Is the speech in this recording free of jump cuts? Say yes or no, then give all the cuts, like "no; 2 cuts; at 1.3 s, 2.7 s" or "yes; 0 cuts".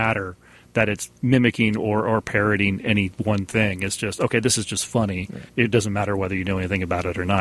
no; 2 cuts; at 1.2 s, 5.5 s